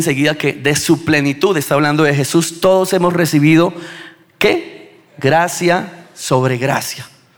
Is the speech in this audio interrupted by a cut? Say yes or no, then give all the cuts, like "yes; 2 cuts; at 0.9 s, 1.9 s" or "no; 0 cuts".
yes; 1 cut; at 5.1 s